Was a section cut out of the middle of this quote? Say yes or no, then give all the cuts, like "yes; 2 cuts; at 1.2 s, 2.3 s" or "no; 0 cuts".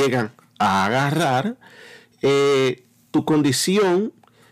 no; 0 cuts